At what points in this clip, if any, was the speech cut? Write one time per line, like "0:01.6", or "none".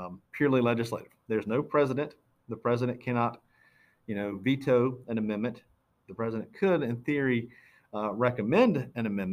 none

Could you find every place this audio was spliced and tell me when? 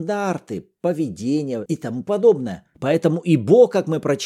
0:02.7

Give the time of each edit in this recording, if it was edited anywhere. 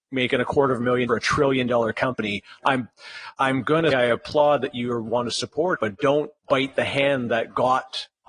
0:01.1
0:03.3
0:03.9
0:05.7
0:06.4

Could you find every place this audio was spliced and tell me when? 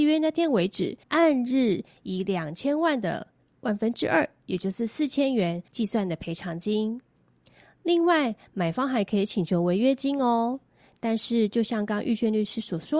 0:01.0
0:05.7

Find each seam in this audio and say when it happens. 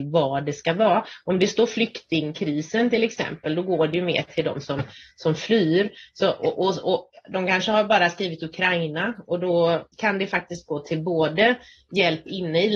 0:09.9

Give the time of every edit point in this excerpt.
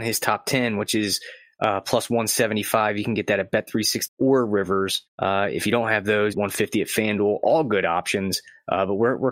0:04.1
0:05.1
0:06.3

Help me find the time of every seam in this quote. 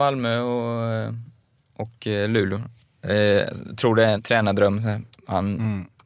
0:04.2

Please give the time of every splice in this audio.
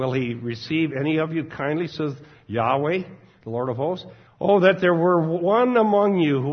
0:04.3

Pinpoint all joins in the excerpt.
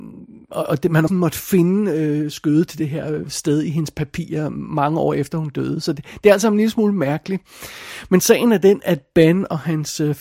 0:01.1

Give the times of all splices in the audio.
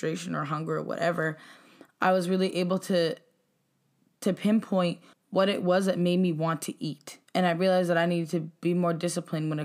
0:05.1
0:07.3

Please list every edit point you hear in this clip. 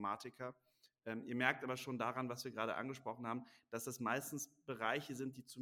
none

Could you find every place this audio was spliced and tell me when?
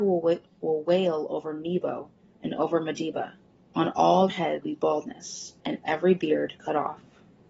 0:03.5
0:04.3
0:04.6
0:05.6

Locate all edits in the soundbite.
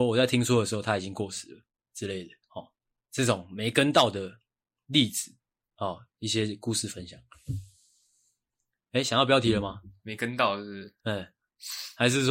0:02.4
0:11.0

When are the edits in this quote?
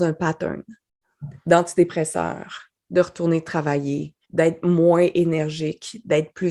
0:04.2

